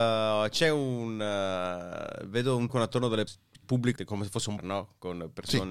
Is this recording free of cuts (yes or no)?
no